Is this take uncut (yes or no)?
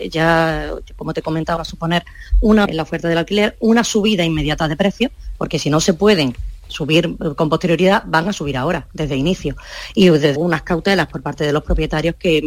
no